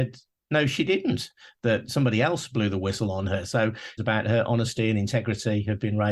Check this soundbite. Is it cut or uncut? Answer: cut